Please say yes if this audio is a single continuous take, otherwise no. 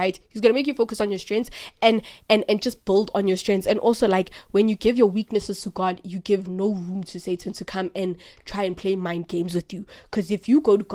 yes